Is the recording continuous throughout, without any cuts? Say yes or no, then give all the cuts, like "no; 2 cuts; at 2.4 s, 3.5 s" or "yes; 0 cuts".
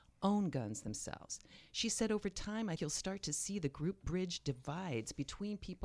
no; 1 cut; at 2.8 s